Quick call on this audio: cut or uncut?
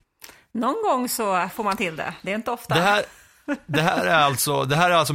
uncut